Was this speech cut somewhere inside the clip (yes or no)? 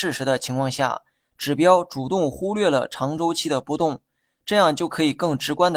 no